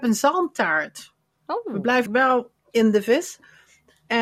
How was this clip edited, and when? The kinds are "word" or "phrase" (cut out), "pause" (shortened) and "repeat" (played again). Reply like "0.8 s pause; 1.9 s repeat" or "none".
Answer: 2.1 s word; 2.6 s word

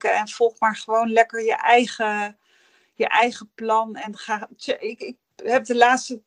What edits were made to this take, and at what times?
none

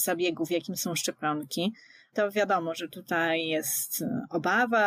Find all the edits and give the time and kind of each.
2.1 s phrase

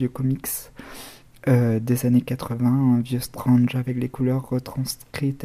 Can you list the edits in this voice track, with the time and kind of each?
none

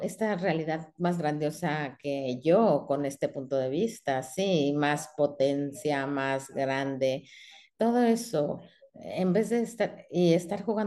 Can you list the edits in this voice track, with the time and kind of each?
none

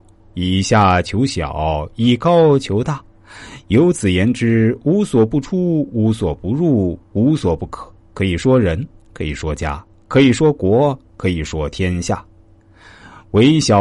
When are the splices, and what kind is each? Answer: 8.0 s pause

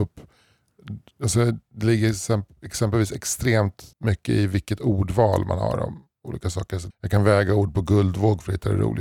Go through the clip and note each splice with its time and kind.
3.9 s pause; 6.9 s word

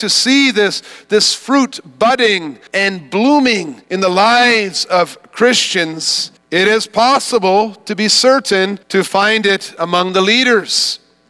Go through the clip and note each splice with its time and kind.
2.7 s pause; 3.8 s pause; 6.4 s pause; 8.8 s pause

